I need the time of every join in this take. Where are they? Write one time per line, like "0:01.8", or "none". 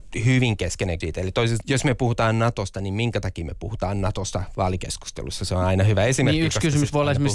0:01.0
0:01.6